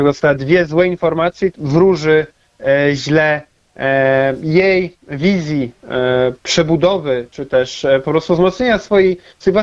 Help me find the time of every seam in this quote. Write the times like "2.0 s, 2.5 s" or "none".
1.5 s